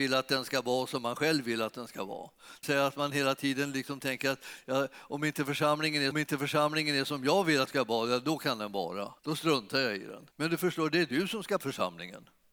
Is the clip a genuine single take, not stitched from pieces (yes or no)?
no